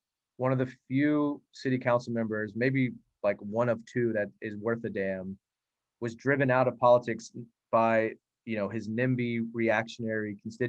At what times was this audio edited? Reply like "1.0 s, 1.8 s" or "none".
none